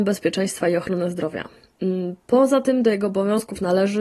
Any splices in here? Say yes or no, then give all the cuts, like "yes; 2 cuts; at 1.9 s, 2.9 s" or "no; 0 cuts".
no; 0 cuts